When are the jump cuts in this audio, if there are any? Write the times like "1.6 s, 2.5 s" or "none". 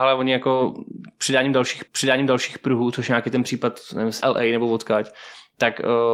1.9 s, 4.2 s